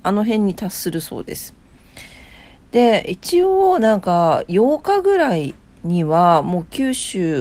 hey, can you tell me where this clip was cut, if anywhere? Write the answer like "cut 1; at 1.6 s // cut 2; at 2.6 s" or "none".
none